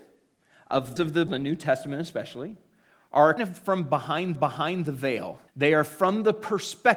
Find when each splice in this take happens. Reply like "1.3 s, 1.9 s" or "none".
1.0 s, 1.3 s, 3.4 s, 4.3 s, 5.5 s